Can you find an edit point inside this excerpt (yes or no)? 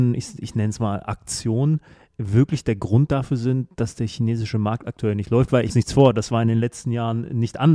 yes